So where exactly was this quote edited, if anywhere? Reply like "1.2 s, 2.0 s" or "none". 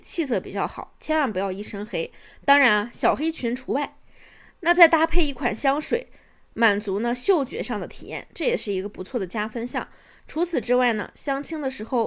none